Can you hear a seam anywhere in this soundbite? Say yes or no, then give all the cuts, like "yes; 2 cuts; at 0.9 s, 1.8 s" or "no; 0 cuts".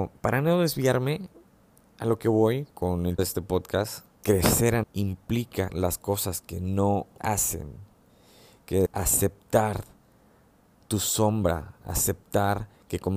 yes; 8 cuts; at 1.6 s, 2.7 s, 3.2 s, 4.1 s, 4.8 s, 5.7 s, 7.2 s, 8.9 s